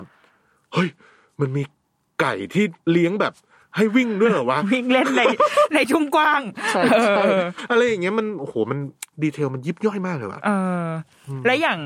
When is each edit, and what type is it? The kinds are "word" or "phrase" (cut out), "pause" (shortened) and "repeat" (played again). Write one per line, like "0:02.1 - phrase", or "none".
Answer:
none

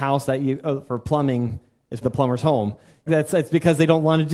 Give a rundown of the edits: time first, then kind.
0:02.0 - word
0:03.1 - phrase

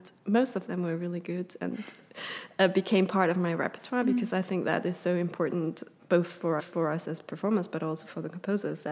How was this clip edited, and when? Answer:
0:06.6 - repeat

